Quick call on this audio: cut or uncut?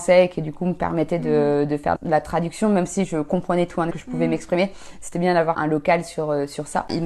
cut